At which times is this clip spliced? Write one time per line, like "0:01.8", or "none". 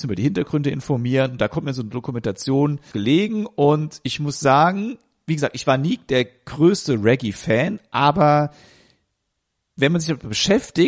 0:02.9